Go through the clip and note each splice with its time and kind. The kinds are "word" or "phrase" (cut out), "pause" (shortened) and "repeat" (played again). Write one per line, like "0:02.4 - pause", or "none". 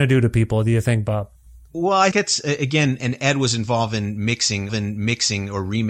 0:01.5 - pause
0:02.1 - word
0:03.0 - word
0:04.7 - repeat